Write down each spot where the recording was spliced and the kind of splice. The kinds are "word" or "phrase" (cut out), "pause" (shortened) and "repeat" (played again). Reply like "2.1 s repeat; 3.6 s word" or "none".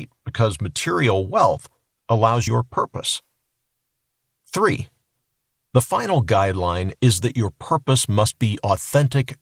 2.5 s phrase